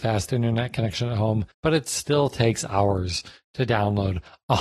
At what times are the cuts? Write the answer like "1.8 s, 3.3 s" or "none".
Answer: 1.5 s